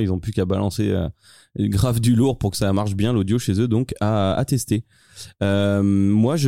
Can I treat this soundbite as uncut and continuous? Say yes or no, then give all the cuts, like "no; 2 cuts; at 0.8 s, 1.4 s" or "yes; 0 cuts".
yes; 0 cuts